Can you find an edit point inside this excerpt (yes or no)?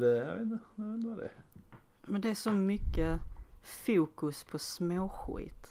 no